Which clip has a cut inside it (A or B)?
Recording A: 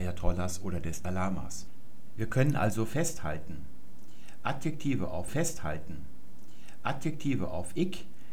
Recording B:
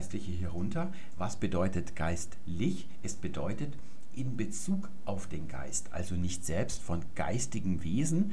A